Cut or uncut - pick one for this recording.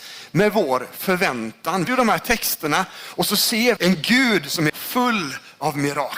cut